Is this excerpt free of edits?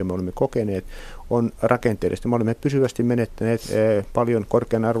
yes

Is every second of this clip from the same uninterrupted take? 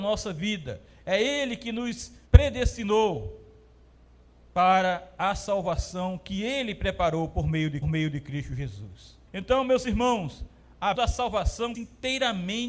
no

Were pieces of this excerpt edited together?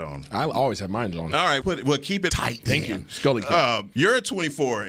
yes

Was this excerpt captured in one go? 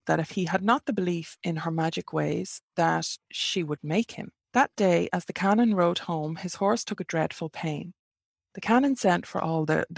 no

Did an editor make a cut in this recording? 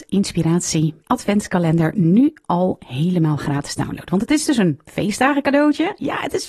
yes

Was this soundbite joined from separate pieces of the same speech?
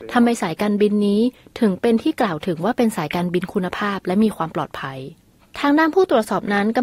no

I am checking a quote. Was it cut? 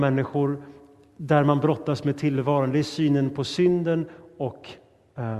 no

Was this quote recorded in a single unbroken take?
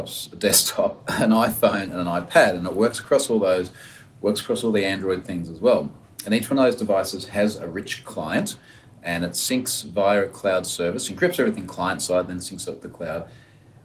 yes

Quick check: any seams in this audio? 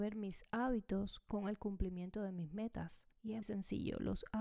yes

